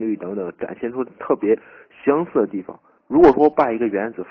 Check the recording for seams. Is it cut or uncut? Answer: cut